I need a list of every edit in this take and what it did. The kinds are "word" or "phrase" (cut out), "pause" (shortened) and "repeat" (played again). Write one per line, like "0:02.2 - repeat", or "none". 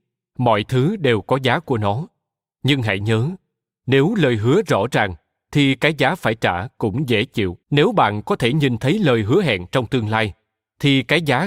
0:07.6 - pause